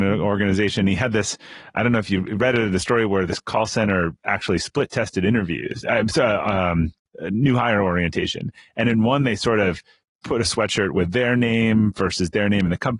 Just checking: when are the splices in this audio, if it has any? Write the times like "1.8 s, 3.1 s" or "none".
none